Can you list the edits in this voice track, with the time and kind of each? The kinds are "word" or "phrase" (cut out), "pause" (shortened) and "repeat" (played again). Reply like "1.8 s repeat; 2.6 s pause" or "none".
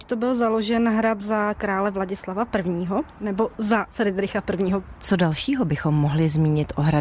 1.6 s word